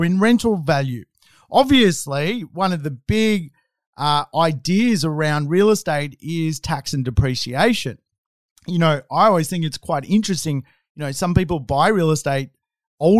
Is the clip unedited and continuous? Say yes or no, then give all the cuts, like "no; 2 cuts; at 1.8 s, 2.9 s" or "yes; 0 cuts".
yes; 0 cuts